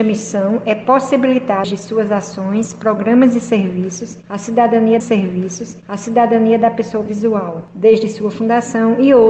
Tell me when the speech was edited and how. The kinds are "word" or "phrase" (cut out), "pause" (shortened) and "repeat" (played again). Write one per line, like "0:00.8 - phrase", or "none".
0:01.6 - word
0:05.0 - repeat
0:07.1 - word